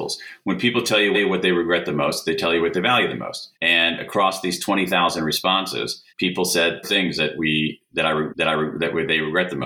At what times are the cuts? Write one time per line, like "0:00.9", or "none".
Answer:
0:01.1
0:03.5
0:06.1
0:06.8
0:08.3